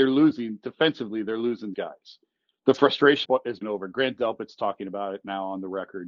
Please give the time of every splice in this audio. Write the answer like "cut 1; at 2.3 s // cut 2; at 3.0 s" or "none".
cut 1; at 1.7 s // cut 2; at 3.2 s // cut 3; at 3.6 s